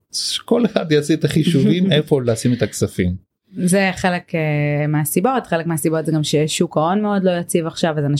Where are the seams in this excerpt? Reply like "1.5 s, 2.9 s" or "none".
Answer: none